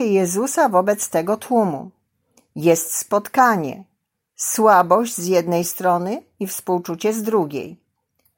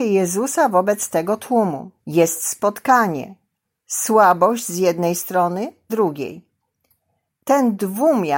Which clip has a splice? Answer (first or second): second